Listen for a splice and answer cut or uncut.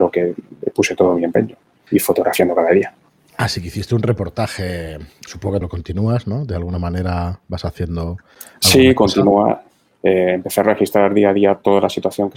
cut